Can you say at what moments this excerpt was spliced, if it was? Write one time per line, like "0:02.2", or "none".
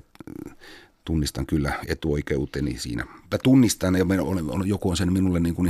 0:03.2